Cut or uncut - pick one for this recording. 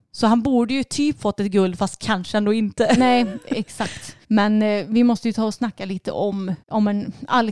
cut